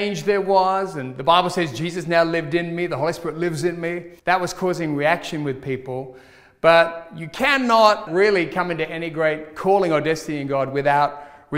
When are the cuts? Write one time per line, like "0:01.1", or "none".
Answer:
0:04.2
0:08.1